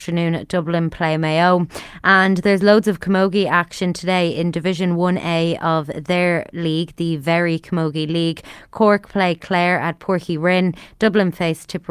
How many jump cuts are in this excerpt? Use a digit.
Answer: 0